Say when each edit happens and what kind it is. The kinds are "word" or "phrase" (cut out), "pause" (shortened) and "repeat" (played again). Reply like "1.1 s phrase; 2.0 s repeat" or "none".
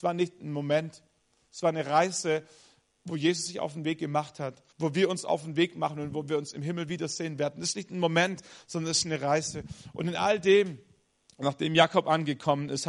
4.7 s pause